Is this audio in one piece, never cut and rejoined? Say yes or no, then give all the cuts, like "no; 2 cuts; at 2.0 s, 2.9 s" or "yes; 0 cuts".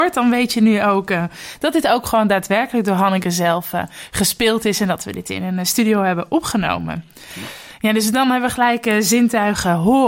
yes; 0 cuts